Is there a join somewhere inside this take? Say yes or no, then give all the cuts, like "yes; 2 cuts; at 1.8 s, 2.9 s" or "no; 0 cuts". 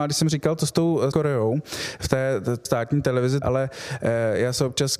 yes; 3 cuts; at 1.1 s, 2.6 s, 3.4 s